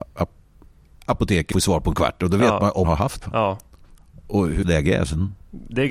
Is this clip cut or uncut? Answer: cut